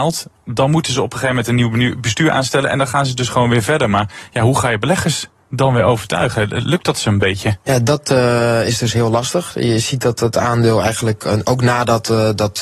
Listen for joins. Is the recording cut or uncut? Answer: uncut